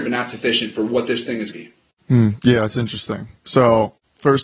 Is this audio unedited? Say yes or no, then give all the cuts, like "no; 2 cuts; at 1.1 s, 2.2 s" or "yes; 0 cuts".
no; 1 cut; at 1.5 s